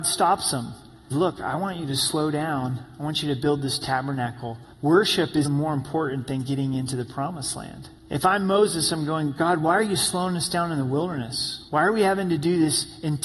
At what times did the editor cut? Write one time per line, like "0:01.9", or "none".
0:01.1
0:04.7
0:05.4
0:08.0
0:11.7